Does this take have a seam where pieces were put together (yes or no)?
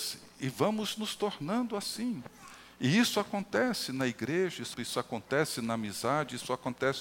yes